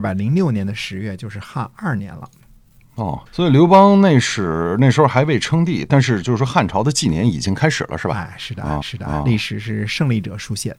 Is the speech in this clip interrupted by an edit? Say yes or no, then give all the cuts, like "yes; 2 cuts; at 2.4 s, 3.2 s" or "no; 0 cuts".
yes; 2 cuts; at 3.3 s, 8.8 s